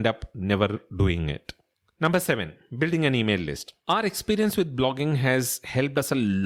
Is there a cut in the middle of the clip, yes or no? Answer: no